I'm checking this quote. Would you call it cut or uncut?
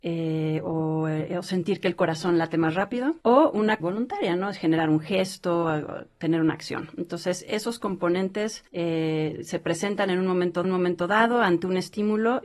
cut